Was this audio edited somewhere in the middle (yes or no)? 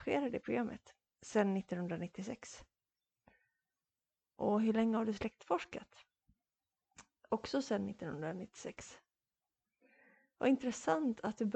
no